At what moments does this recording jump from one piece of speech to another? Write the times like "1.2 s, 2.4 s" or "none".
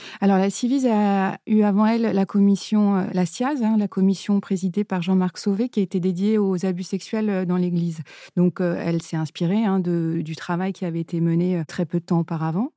none